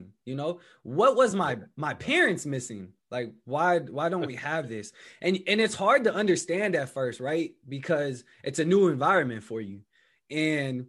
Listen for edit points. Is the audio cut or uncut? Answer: uncut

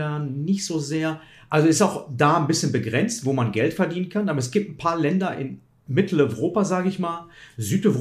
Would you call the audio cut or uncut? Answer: uncut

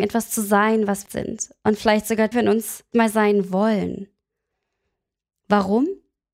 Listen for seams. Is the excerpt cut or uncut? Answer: cut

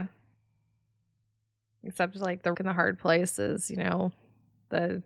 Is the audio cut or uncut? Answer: cut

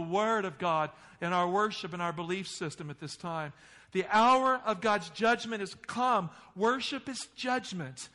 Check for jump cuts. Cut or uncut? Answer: uncut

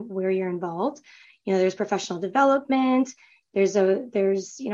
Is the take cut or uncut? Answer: uncut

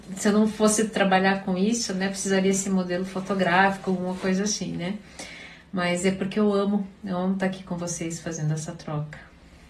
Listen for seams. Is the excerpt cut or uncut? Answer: uncut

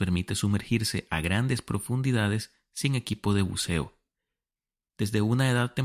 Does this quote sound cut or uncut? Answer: uncut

